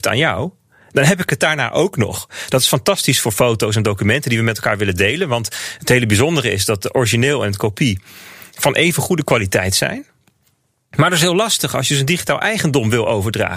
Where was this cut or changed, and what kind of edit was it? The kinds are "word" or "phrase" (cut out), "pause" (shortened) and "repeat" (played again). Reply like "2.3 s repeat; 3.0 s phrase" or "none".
none